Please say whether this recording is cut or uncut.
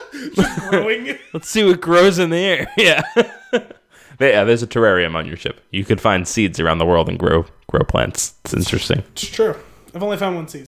uncut